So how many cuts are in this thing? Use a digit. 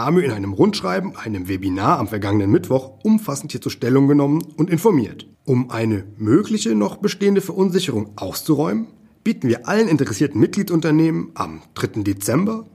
2